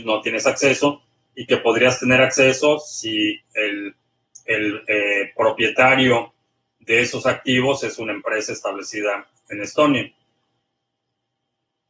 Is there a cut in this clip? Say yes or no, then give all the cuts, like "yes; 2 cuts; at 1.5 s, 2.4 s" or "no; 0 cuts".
no; 0 cuts